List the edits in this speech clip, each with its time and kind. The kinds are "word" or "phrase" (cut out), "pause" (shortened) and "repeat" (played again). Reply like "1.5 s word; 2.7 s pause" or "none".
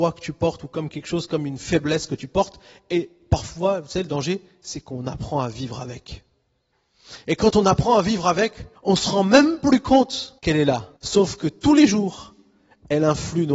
8.8 s pause; 10.4 s pause; 11.0 s pause